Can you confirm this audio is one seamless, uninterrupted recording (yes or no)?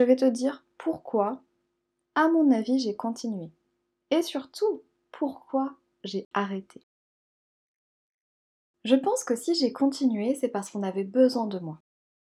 yes